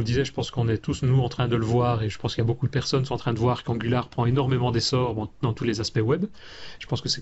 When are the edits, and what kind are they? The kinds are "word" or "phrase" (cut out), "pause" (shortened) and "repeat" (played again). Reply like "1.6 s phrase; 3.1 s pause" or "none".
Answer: none

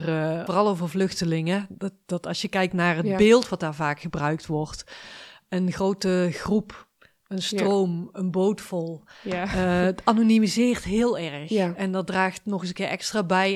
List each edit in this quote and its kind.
none

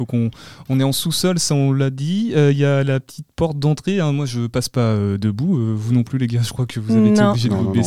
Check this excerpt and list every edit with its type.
none

